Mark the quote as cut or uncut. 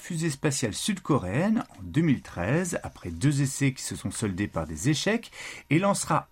uncut